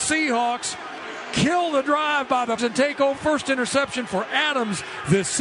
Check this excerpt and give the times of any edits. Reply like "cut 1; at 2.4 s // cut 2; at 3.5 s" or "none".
cut 1; at 2.6 s // cut 2; at 3.2 s